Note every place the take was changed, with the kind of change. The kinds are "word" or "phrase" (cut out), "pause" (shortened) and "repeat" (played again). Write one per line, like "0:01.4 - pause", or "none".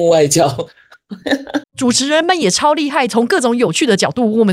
0:01.6 - pause